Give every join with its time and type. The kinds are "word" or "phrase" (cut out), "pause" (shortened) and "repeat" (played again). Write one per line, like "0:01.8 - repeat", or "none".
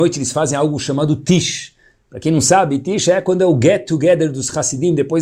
none